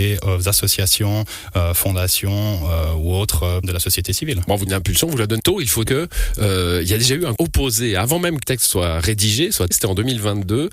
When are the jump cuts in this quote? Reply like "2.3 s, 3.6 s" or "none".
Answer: 3.6 s, 4.7 s, 5.4 s, 5.9 s, 7.4 s, 8.4 s, 9.7 s